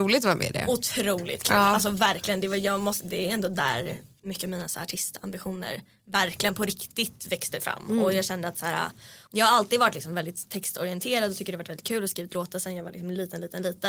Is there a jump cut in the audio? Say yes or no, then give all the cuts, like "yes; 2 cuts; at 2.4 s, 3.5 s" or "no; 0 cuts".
no; 0 cuts